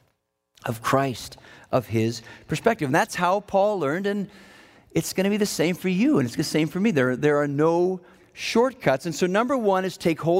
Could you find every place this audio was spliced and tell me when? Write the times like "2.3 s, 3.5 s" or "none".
6.4 s